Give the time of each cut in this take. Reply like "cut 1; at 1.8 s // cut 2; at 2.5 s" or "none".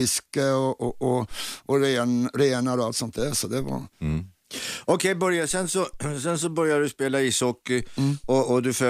none